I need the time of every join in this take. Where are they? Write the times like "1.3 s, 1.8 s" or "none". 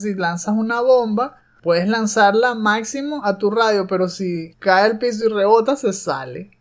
none